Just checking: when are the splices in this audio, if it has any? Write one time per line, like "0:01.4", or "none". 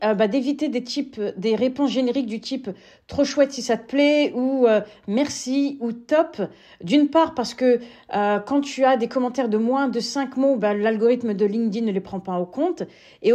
none